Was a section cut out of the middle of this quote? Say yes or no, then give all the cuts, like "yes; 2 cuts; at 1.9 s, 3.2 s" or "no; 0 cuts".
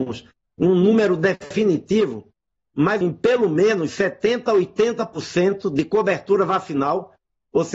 yes; 1 cut; at 3.0 s